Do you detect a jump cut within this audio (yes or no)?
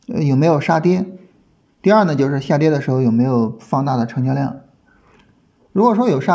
no